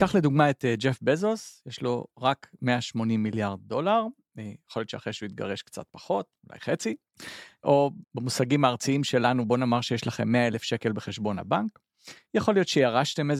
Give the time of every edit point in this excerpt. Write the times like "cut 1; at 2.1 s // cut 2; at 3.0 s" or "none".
cut 1; at 8.0 s

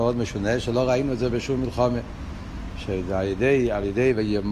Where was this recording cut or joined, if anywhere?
none

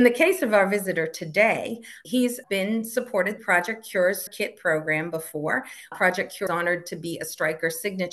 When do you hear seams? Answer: cut 1; at 2.0 s // cut 2; at 2.4 s // cut 3; at 3.4 s // cut 4; at 4.3 s // cut 5; at 5.9 s // cut 6; at 6.5 s

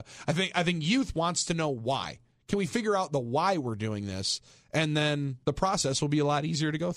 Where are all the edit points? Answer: cut 1; at 5.4 s

